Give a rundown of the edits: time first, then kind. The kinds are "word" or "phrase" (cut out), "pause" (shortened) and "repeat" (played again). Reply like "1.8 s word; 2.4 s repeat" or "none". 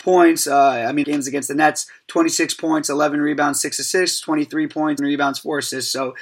1.0 s phrase; 5.0 s word